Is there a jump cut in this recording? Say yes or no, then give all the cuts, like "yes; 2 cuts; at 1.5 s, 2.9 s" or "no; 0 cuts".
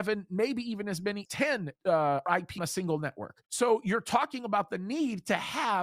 yes; 4 cuts; at 1.3 s, 1.8 s, 2.6 s, 3.4 s